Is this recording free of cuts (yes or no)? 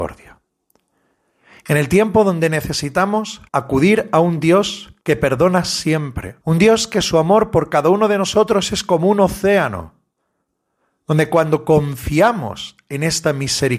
no